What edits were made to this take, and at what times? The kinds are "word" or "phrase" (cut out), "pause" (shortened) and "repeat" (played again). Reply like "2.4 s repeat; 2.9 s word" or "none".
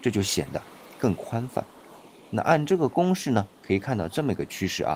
3.6 s pause